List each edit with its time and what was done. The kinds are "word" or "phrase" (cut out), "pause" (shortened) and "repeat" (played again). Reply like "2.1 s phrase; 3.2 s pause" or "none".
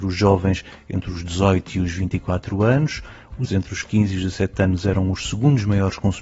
3.4 s word

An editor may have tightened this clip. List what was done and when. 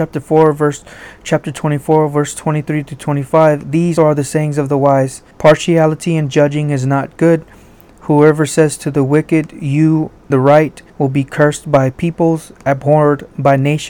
4.0 s word; 5.3 s pause; 10.3 s phrase; 10.9 s pause

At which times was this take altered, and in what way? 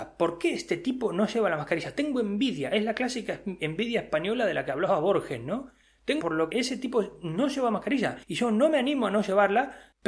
6.2 s word; 6.5 s word; 8.2 s pause

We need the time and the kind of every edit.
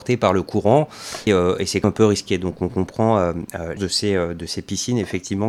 1.3 s word; 1.8 s word; 3.8 s word

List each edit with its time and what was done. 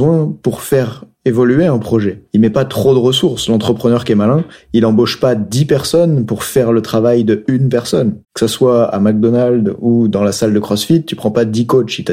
2.3 s pause; 8.2 s pause

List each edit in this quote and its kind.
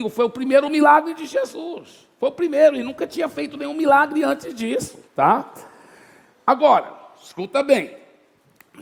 5.1 s pause

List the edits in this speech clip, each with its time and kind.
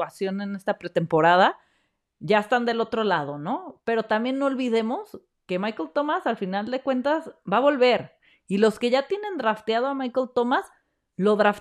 none

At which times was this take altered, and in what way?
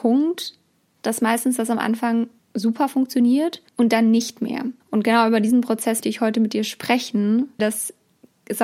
2.4 s pause; 3.7 s pause; 4.8 s pause; 6.0 s word; 7.6 s word

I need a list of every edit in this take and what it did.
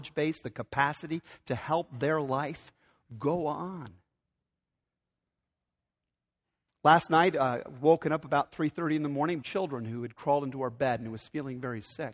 9.4 s phrase

